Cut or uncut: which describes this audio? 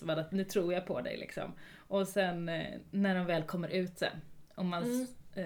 uncut